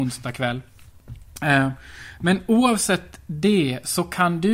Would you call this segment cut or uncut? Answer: uncut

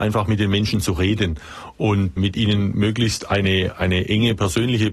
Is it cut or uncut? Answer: cut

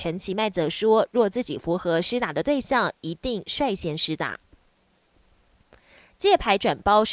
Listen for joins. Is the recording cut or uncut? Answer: uncut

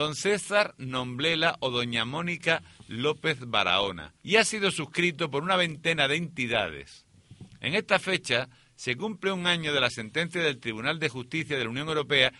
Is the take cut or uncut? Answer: cut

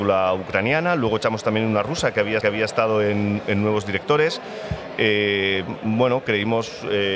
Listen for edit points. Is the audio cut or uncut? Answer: cut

